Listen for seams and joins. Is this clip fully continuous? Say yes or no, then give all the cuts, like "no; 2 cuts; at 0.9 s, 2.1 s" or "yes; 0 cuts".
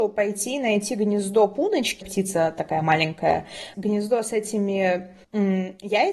no; 3 cuts; at 2.0 s, 3.7 s, 5.2 s